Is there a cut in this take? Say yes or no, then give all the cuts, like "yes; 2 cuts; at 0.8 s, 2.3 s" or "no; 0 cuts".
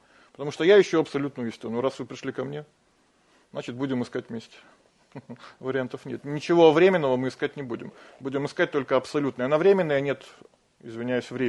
no; 0 cuts